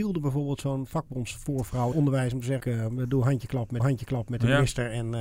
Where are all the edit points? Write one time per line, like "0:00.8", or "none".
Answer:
0:01.9
0:02.6
0:03.8